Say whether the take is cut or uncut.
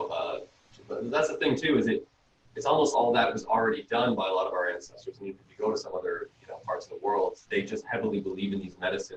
cut